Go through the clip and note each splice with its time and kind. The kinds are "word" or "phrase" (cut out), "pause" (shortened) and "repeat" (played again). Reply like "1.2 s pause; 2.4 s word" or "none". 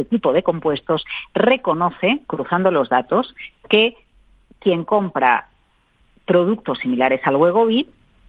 none

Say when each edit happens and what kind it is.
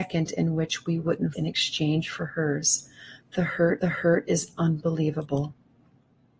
1.3 s phrase; 3.8 s repeat

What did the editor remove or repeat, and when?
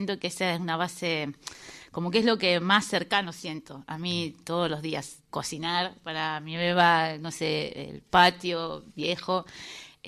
5.3 s word

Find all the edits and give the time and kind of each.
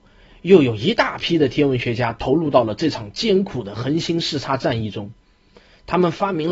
none

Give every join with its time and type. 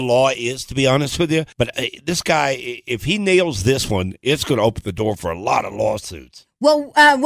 1.5 s pause

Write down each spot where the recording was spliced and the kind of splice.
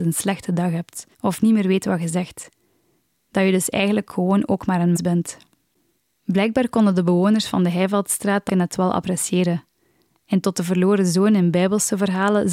1.1 s pause; 5.0 s word; 6.0 s pause; 8.5 s word; 10.4 s word

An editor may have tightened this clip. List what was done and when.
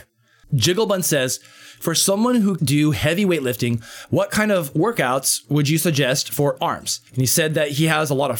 2.6 s word; 6.6 s phrase; 7.1 s pause

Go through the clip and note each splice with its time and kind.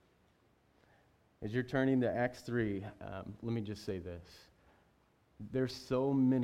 none

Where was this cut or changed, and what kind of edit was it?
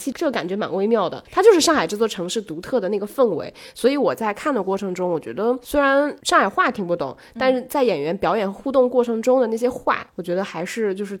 10.1 s pause

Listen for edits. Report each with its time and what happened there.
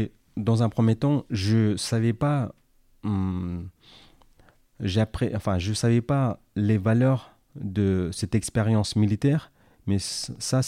none

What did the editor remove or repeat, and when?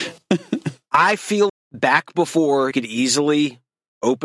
1.5 s word; 2.7 s word

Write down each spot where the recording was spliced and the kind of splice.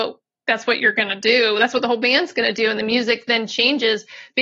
none

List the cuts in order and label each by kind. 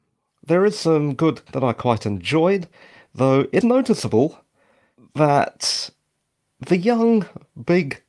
1.5 s phrase; 3.6 s word

